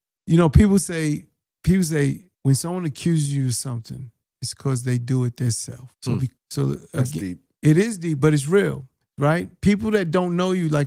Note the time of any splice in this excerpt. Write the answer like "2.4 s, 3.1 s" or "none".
1.4 s, 2.3 s, 4.2 s, 5.9 s, 6.4 s, 9.0 s